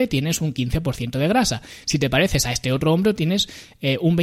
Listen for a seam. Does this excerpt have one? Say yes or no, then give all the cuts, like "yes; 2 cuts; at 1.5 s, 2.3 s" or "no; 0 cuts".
no; 0 cuts